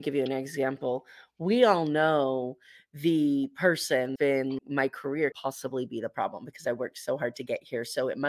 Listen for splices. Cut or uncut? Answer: cut